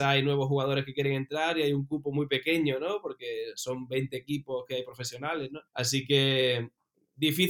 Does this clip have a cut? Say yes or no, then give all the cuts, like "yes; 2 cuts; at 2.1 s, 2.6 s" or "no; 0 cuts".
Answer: yes; 1 cut; at 5.7 s